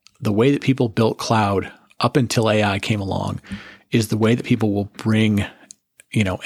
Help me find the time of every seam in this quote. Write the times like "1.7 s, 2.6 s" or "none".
none